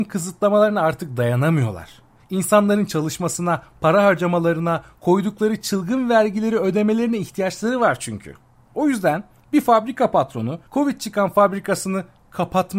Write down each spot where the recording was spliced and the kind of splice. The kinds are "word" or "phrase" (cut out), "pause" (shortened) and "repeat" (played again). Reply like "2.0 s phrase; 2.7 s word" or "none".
10.7 s pause